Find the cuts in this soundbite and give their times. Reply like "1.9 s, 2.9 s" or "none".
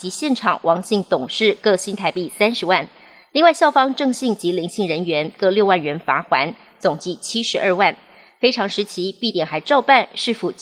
none

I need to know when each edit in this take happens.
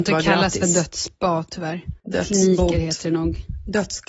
2.0 s

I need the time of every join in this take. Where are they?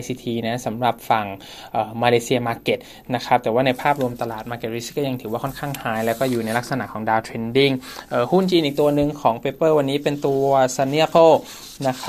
11.1 s

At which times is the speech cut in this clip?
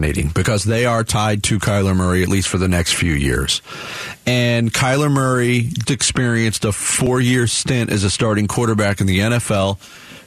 5.8 s

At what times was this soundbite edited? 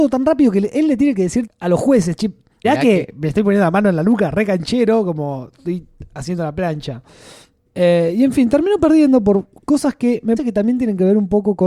1.5 s, 2.6 s, 10.4 s

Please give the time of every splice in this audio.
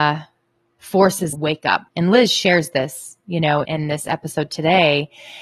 1.3 s, 1.9 s, 3.6 s

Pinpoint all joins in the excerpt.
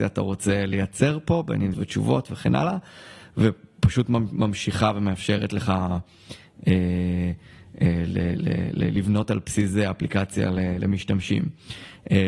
1.7 s

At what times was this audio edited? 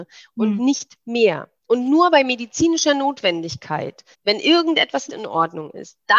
1.6 s, 4.1 s, 5.1 s

